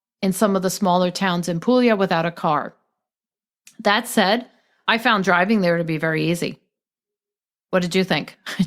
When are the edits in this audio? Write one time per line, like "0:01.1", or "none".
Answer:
none